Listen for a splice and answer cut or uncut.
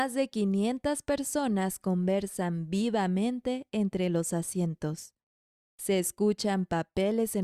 uncut